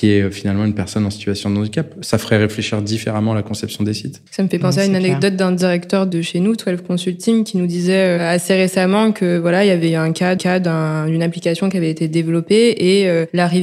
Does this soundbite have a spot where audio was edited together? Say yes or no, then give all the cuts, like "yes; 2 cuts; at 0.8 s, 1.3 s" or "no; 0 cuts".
yes; 2 cuts; at 4.3 s, 10.4 s